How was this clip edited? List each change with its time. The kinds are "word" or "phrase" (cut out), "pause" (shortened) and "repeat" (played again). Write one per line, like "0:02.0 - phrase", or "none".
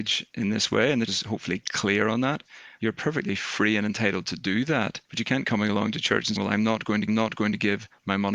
0:01.1 - word
0:05.0 - pause
0:05.4 - word
0:06.4 - word
0:07.1 - repeat